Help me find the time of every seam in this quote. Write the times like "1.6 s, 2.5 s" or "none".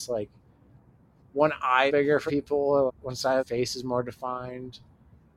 1.9 s, 2.3 s, 2.9 s, 3.4 s